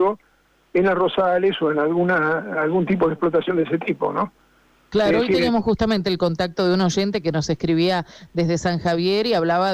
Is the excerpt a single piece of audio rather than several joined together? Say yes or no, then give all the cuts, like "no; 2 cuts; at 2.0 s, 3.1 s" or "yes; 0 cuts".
yes; 0 cuts